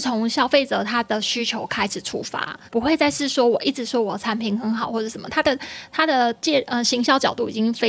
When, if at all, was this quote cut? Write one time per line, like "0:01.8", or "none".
0:02.7